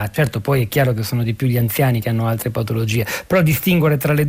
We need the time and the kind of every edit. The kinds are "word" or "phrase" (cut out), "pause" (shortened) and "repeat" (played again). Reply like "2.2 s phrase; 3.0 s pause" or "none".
2.0 s word